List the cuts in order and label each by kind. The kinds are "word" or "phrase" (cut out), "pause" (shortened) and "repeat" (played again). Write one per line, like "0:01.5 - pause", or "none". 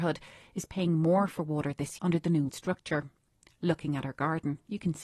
0:02.0 - word
0:02.5 - word